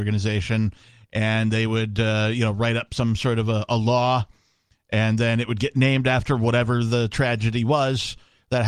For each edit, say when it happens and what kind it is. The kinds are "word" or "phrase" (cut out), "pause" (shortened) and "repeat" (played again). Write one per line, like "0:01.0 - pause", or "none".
none